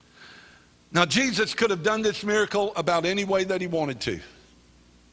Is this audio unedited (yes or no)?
yes